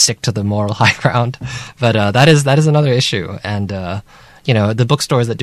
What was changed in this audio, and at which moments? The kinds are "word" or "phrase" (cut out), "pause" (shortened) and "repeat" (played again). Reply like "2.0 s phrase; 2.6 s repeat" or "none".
none